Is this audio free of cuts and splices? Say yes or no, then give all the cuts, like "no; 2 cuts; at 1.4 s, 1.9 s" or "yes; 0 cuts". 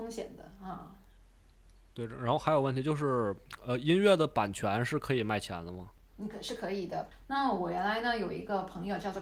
yes; 0 cuts